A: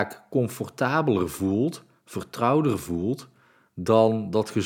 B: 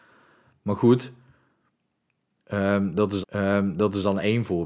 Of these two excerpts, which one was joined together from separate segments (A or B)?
B